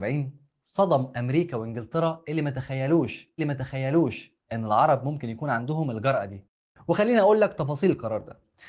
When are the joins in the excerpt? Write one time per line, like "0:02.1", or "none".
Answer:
0:03.4